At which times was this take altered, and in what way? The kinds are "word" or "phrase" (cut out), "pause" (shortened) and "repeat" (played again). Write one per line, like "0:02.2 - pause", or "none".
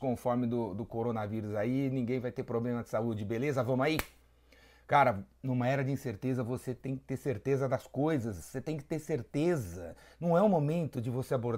none